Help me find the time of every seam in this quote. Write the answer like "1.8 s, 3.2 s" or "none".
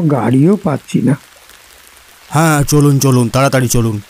none